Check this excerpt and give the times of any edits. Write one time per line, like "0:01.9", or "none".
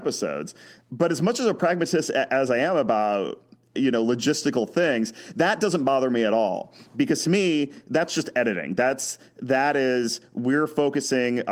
none